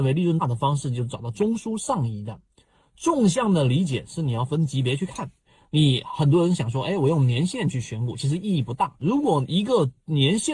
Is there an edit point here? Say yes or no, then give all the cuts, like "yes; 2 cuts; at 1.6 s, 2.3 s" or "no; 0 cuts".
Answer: no; 0 cuts